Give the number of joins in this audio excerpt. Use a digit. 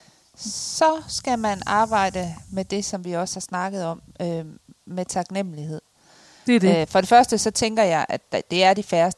0